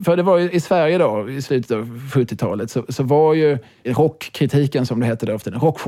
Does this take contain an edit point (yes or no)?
no